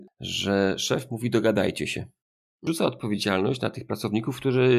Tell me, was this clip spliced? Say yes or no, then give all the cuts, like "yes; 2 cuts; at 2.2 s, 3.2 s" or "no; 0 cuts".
no; 0 cuts